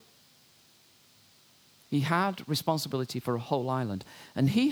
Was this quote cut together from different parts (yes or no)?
no